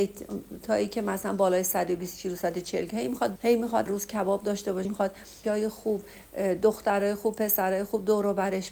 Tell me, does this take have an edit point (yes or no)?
yes